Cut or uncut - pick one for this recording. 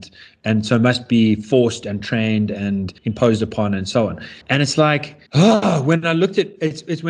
cut